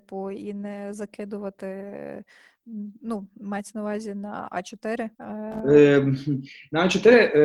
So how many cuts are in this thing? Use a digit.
1